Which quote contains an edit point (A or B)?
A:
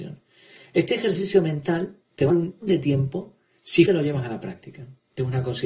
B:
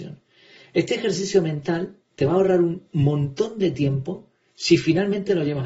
A